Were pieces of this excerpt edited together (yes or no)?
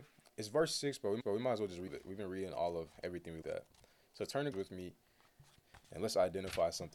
yes